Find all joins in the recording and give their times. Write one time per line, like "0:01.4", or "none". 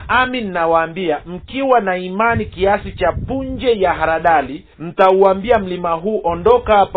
0:04.7